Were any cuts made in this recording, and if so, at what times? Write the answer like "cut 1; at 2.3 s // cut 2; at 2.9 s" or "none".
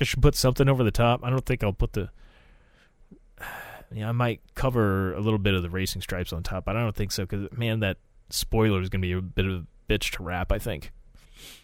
none